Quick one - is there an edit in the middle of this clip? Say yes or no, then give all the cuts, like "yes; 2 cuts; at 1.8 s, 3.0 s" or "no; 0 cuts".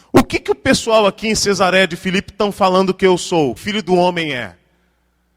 yes; 1 cut; at 3.6 s